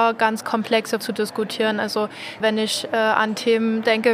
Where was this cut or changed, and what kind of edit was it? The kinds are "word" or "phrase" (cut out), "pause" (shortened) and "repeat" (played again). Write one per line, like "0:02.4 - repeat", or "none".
0:01.0 - word
0:02.4 - word